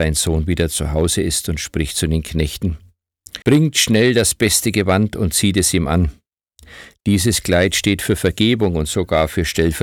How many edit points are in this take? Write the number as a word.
one